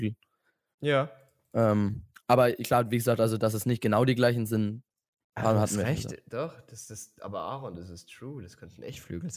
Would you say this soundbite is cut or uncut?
uncut